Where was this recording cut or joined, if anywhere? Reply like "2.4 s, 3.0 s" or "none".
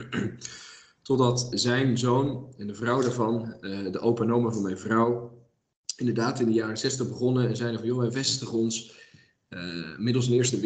1.5 s